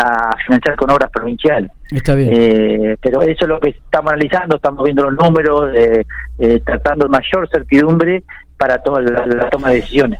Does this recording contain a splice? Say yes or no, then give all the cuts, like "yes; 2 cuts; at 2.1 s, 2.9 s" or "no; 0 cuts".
yes; 3 cuts; at 3.2 s, 7.1 s, 9.3 s